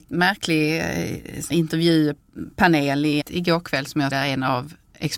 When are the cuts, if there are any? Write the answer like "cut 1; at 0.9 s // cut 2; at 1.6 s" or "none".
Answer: cut 1; at 1.5 s // cut 2; at 3.2 s // cut 3; at 4.1 s